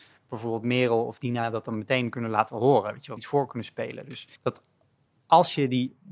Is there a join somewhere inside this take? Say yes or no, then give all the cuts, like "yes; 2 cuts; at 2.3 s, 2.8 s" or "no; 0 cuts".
yes; 2 cuts; at 3.2 s, 4.4 s